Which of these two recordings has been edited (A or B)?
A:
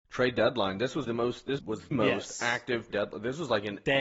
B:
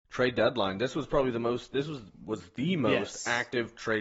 A